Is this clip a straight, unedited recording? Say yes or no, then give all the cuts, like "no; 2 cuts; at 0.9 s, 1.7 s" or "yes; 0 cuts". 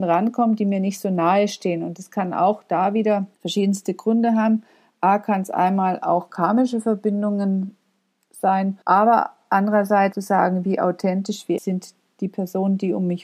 no; 4 cuts; at 3.3 s, 8.8 s, 10.1 s, 11.6 s